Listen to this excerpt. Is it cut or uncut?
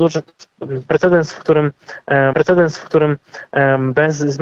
cut